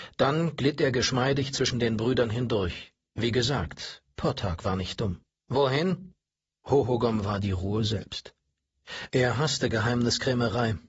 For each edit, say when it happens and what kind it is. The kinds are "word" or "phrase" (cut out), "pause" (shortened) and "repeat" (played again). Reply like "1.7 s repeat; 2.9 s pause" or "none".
5.3 s pause